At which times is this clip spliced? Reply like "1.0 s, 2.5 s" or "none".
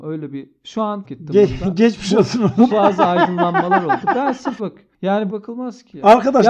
1.0 s, 2.7 s, 4.6 s, 5.3 s